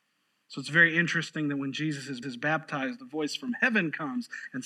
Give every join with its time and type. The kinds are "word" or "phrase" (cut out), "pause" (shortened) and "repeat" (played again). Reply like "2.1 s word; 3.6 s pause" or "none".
2.2 s repeat